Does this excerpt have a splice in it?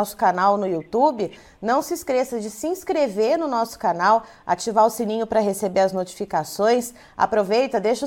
no; 0 cuts

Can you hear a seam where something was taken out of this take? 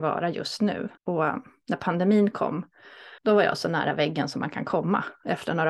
yes; 2 cuts; at 1.0 s, 3.2 s

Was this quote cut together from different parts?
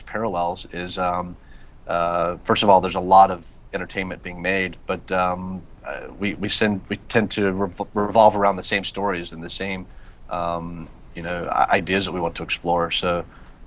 no; 0 cuts

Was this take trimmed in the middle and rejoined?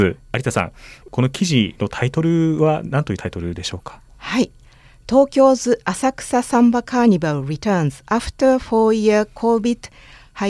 no; 0 cuts

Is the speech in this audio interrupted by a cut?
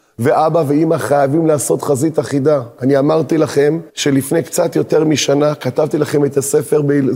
yes; 1 cut; at 3.9 s

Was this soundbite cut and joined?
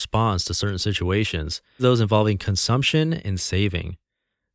yes; 1 cut; at 1.8 s

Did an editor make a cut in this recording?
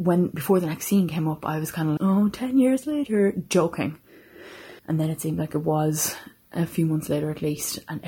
yes; 2 cuts; at 2.0 s, 4.8 s

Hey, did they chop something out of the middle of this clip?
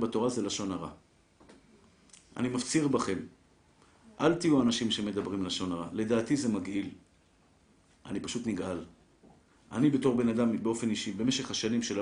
no; 0 cuts

